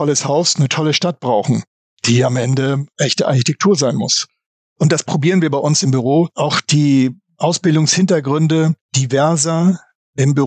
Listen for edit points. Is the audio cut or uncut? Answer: uncut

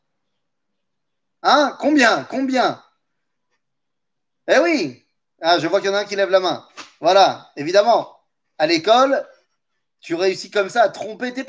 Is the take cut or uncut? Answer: uncut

